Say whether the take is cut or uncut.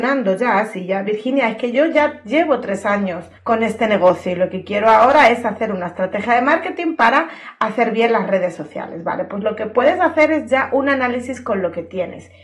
cut